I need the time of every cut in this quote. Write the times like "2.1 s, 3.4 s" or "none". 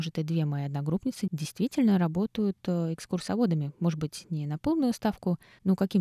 none